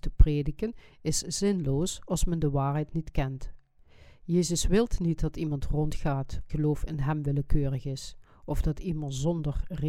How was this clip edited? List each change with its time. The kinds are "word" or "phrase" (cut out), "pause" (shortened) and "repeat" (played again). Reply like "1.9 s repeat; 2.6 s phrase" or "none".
6.5 s phrase